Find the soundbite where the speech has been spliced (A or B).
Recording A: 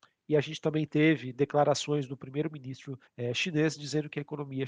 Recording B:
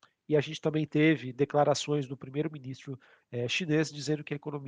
A